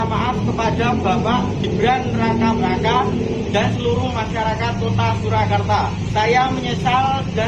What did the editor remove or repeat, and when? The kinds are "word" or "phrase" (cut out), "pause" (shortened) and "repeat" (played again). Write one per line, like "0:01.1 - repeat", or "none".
0:02.6 - word